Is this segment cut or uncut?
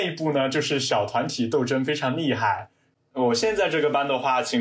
uncut